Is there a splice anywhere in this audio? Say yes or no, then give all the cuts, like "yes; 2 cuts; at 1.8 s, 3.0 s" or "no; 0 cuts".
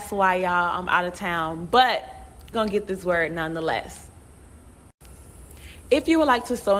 yes; 1 cut; at 2.5 s